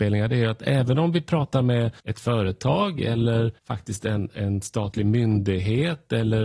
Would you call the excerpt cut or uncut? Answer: cut